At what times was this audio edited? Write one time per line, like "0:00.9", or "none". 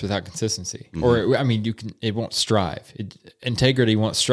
none